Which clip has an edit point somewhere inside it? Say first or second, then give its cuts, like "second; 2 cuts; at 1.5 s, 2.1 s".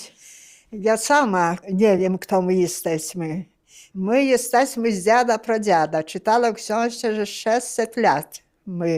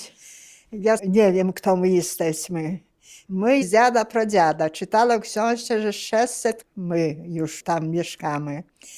second; 3 cuts; at 1.0 s, 3.6 s, 6.6 s